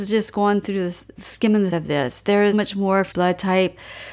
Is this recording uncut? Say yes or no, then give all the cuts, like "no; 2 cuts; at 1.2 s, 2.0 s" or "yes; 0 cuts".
no; 4 cuts; at 1.2 s, 1.7 s, 2.5 s, 3.1 s